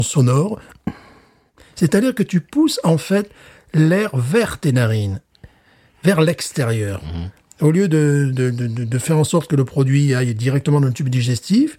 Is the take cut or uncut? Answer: uncut